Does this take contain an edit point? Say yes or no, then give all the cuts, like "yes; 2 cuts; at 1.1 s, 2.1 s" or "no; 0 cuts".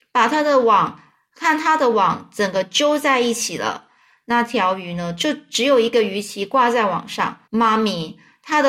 yes; 1 cut; at 7.5 s